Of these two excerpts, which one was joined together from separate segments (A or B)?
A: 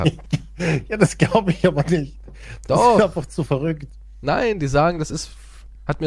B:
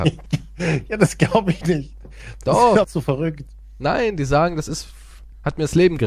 B